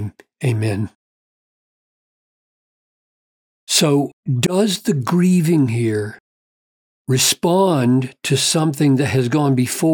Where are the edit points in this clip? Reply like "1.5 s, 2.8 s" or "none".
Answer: 4.2 s, 6.7 s